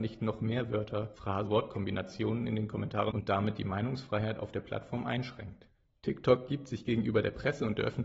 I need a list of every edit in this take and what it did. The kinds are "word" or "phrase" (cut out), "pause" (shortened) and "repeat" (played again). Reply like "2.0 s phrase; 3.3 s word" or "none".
1.5 s word; 3.1 s word